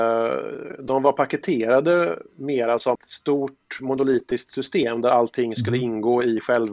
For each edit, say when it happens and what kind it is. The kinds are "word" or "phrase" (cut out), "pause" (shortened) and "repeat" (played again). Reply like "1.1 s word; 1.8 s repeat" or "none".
2.3 s pause; 2.9 s word